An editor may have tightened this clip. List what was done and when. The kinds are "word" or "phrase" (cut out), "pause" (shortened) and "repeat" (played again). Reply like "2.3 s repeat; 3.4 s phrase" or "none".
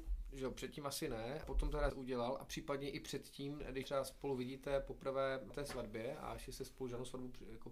1.4 s word; 1.9 s word; 3.8 s word; 5.5 s word